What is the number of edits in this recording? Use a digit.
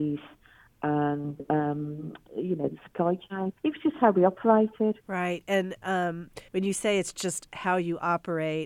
3